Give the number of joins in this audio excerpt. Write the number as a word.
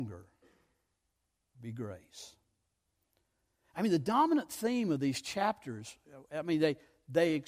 zero